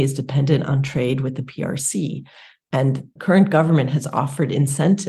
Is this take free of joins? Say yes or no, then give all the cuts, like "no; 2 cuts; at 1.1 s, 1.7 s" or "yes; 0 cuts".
no; 1 cut; at 3.2 s